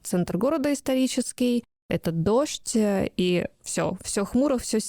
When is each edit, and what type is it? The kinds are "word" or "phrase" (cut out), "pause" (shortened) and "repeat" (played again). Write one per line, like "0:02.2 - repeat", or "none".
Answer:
none

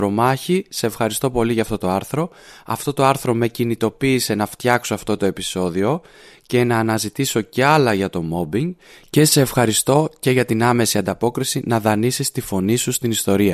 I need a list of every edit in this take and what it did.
none

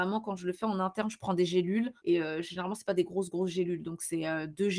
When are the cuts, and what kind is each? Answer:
0:02.0 - pause

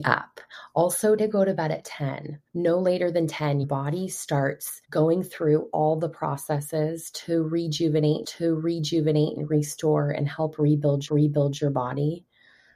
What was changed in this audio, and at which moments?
0:01.2 - word
0:02.5 - pause
0:03.6 - word
0:04.8 - pause
0:08.2 - repeat
0:11.1 - repeat

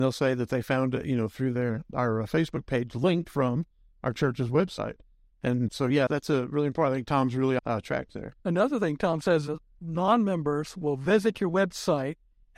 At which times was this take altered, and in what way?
0:05.7 - word
0:06.1 - word
0:07.6 - phrase
0:08.4 - pause

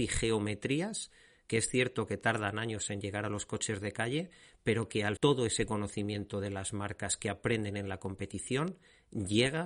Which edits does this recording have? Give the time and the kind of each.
0:05.2 - word

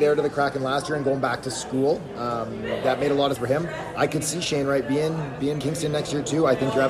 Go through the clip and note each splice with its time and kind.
0:03.4 - word
0:05.6 - phrase

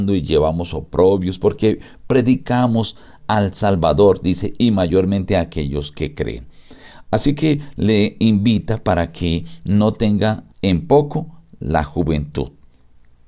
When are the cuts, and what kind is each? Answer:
0:10.5 - pause

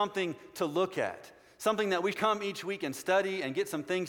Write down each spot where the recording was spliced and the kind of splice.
0:02.1 - word

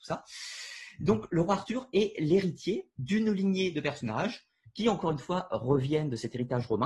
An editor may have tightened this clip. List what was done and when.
none

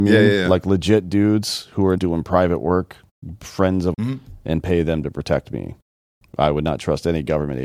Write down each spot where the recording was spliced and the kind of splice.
0:02.0 - word
0:03.9 - word

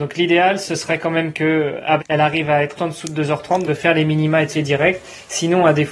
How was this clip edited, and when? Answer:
0:02.0 - word
0:02.8 - word
0:03.7 - word
0:04.5 - word

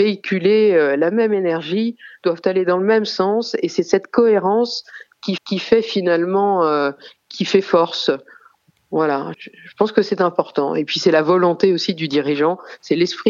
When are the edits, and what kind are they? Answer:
0:05.4 - repeat
0:09.3 - word

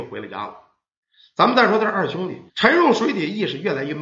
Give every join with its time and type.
0:02.5 - pause

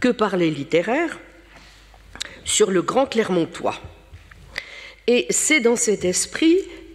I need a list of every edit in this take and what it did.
none

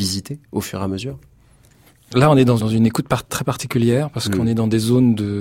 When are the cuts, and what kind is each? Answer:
0:01.9 - pause
0:02.6 - word
0:03.3 - word

